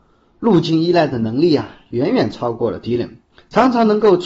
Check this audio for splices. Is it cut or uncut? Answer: cut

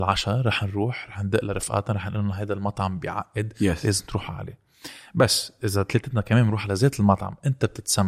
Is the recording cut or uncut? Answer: uncut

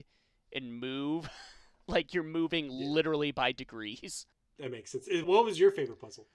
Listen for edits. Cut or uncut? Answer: cut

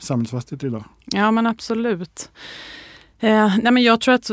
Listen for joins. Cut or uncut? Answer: uncut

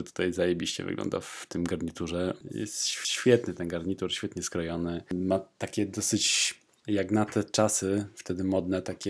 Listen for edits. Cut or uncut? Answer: uncut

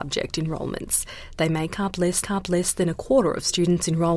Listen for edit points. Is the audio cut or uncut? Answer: cut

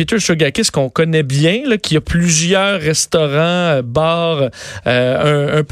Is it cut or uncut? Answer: uncut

